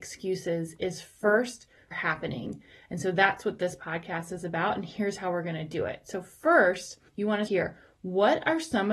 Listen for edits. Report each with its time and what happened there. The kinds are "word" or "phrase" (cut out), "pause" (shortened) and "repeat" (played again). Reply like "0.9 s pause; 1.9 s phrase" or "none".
1.9 s phrase; 7.1 s pause; 7.5 s word